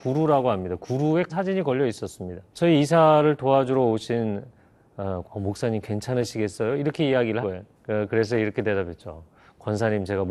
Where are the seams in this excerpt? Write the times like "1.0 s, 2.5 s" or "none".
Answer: 1.3 s, 2.5 s, 5.2 s, 7.4 s, 7.8 s

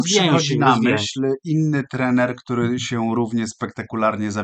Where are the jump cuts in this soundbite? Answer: none

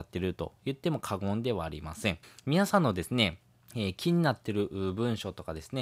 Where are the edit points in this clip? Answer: 2.2 s, 3.5 s

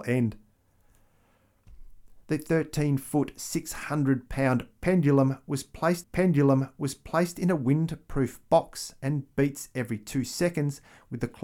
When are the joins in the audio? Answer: 2.2 s, 6.0 s

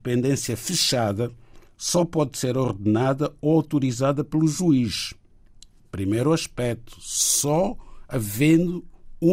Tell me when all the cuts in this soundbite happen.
none

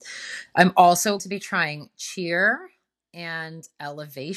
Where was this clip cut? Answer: 1.2 s

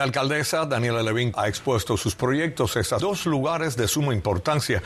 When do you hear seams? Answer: 1.3 s, 3.0 s

